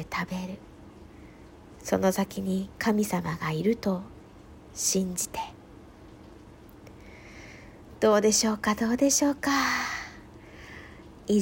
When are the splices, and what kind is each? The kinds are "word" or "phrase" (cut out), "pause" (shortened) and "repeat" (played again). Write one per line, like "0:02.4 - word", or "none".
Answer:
0:02.7 - pause

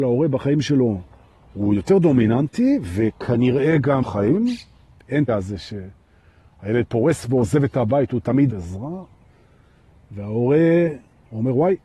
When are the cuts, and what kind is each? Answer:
0:04.0 - word
0:05.3 - word
0:08.5 - word

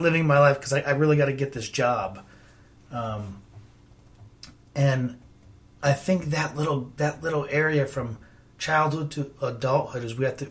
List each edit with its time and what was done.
none

